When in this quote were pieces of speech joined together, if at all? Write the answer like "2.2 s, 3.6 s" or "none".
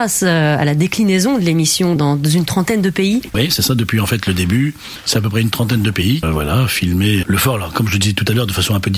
2.0 s, 6.2 s, 7.2 s